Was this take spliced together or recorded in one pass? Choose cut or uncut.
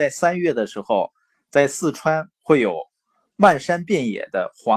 uncut